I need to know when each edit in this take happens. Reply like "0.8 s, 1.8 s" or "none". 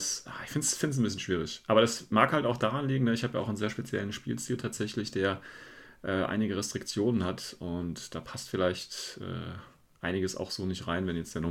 none